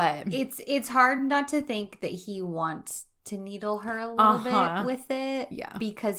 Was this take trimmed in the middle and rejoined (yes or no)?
no